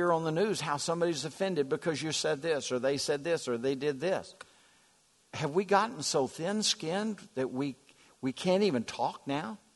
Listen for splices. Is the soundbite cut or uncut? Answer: uncut